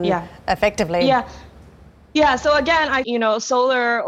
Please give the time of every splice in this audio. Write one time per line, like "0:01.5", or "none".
0:03.0